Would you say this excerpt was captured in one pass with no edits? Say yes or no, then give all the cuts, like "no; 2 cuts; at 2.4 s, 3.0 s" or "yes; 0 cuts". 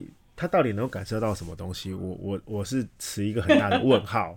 no; 1 cut; at 2.9 s